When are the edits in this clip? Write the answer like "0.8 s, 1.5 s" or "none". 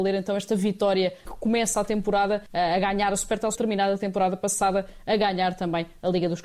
1.3 s, 2.5 s, 3.6 s